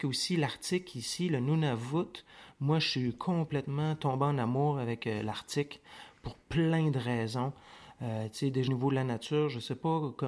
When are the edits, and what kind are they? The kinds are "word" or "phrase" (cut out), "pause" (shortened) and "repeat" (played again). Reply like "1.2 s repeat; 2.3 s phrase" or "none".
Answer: 8.7 s word